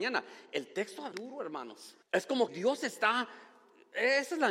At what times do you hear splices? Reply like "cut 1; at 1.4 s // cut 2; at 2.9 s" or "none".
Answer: cut 1; at 1.1 s // cut 2; at 2.0 s // cut 3; at 2.5 s